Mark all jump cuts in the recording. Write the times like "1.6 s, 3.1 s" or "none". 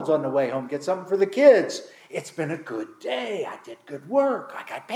none